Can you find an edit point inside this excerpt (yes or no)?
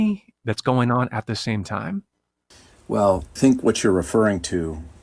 yes